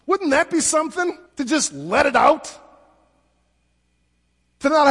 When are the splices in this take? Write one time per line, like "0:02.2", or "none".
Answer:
0:01.3